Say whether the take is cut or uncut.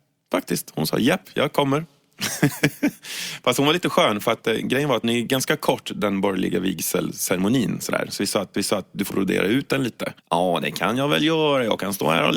cut